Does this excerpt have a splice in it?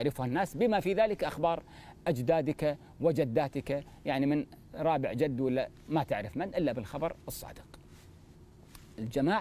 no; 0 cuts

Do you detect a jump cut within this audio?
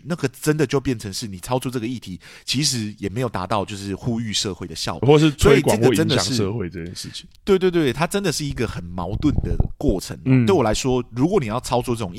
yes; 1 cut; at 5.0 s

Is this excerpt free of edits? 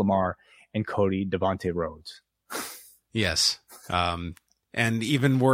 yes; 0 cuts

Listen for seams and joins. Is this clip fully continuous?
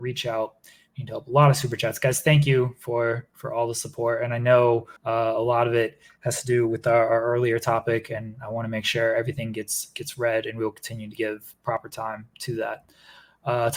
no; 1 cut; at 5.0 s

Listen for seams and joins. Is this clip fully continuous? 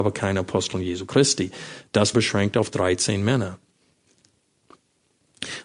no; 1 cut; at 2.1 s

